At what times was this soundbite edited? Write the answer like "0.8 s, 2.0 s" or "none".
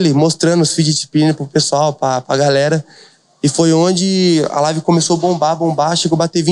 none